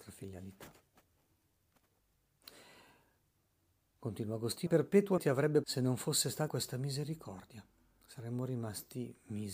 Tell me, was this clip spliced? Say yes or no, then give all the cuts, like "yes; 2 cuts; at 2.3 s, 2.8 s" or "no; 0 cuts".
yes; 4 cuts; at 4.7 s, 5.2 s, 5.6 s, 6.5 s